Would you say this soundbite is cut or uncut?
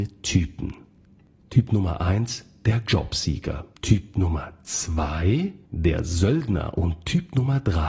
cut